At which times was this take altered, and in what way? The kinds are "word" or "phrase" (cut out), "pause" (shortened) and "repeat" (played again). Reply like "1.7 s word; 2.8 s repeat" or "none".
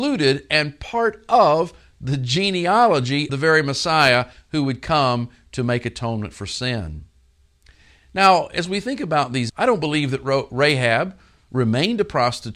3.3 s word; 9.5 s word